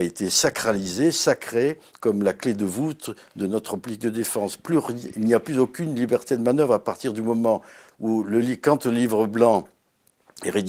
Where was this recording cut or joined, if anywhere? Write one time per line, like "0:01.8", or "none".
none